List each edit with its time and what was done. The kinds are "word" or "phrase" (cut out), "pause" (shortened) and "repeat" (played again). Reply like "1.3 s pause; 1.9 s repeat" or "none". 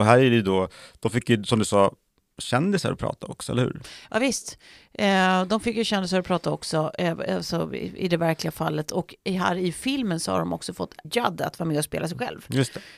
11.0 s word